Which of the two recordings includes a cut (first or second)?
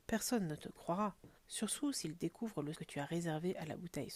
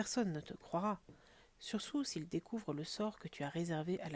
first